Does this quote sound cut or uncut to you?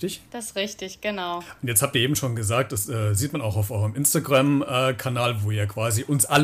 uncut